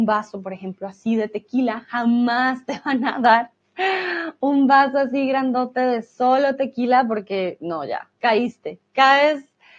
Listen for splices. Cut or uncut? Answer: cut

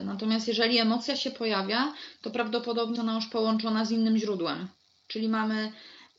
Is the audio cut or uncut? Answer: cut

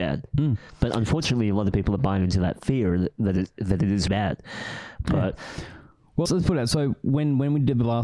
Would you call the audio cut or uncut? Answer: cut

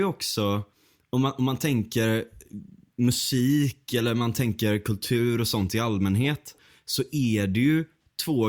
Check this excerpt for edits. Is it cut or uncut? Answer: uncut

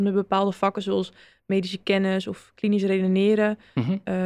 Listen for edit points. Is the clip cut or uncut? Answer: uncut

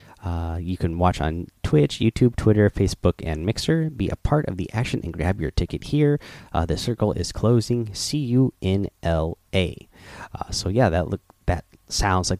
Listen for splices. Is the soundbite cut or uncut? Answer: uncut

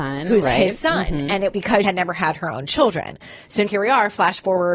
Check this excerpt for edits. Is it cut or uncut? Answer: cut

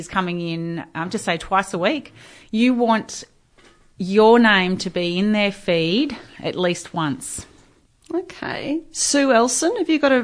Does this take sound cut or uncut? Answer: uncut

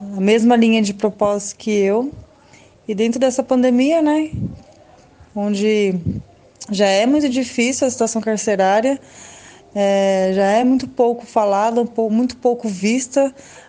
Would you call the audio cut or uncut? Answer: uncut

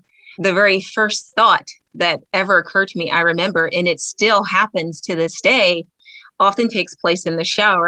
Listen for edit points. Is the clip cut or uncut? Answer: cut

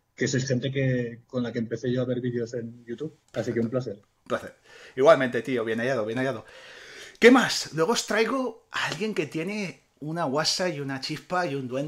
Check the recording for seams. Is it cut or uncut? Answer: cut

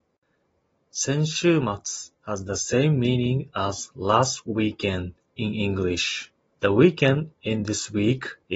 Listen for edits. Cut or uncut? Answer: cut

